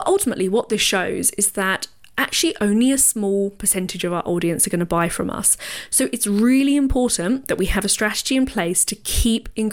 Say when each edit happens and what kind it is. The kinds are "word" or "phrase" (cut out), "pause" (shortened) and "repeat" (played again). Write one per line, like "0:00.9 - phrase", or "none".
none